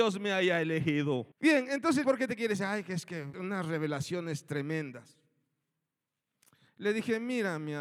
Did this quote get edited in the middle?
yes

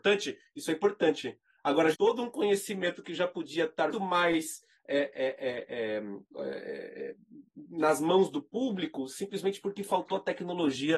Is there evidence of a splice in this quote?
yes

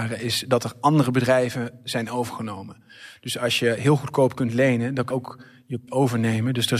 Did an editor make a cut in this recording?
yes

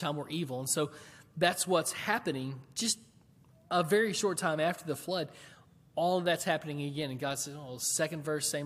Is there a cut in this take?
no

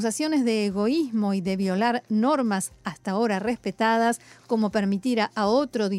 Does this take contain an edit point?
no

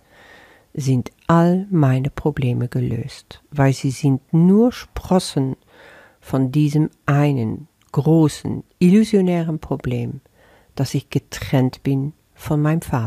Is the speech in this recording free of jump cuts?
yes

